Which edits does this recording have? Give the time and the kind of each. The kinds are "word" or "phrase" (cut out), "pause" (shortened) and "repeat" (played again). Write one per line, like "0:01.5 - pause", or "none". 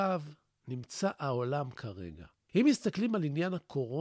none